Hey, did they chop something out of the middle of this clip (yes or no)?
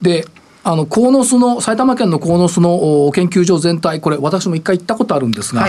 no